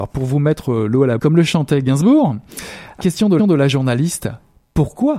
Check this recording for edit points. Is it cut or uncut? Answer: cut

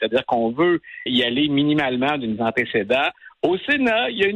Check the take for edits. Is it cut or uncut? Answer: cut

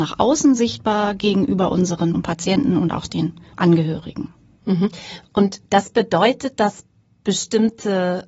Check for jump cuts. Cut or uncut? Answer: cut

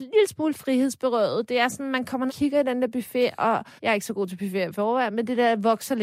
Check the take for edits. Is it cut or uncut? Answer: cut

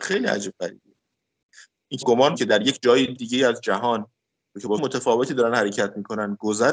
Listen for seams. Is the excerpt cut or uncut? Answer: cut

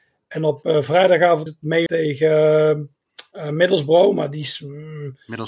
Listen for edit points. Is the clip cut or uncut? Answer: cut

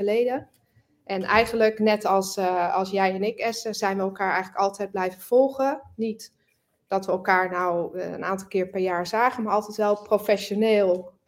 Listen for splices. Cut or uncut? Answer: uncut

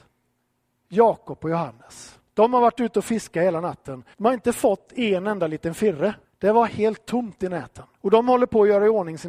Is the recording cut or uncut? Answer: cut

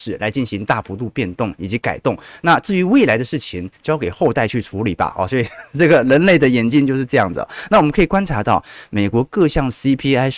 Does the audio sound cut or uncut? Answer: uncut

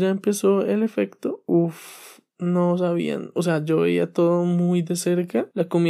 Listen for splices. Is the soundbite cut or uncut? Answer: uncut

